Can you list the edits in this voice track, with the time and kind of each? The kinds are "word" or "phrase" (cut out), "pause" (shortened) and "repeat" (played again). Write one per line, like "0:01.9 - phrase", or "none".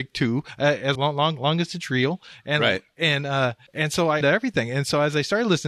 0:00.9 - word
0:03.7 - pause
0:04.2 - phrase